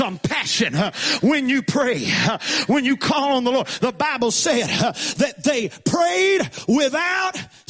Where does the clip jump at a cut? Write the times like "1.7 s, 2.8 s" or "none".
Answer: none